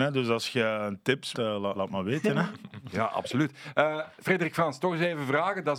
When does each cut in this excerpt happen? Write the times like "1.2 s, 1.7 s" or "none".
1.3 s, 1.7 s, 4.1 s